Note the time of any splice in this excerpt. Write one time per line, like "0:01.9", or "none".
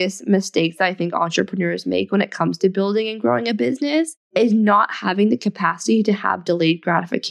0:04.2